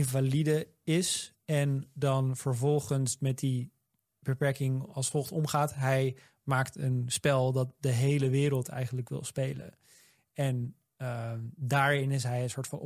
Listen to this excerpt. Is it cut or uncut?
uncut